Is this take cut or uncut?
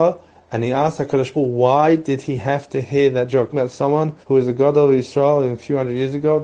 cut